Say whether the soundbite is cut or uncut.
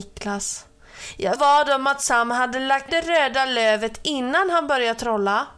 cut